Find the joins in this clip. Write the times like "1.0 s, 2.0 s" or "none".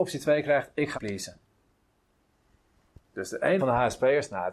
0.9 s, 3.6 s